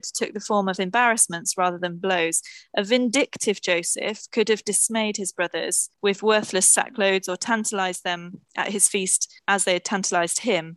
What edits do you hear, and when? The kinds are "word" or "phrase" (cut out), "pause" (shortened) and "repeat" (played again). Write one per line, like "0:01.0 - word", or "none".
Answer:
0:05.9 - pause
0:09.4 - pause